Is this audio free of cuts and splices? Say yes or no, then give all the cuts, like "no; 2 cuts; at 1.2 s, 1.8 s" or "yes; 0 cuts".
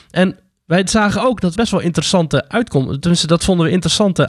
no; 1 cut; at 1.6 s